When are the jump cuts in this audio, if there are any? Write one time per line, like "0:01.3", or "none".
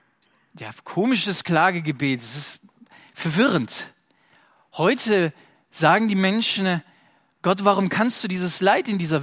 none